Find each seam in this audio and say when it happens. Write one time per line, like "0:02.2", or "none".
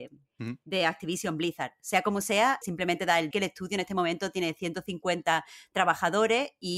0:02.6
0:03.3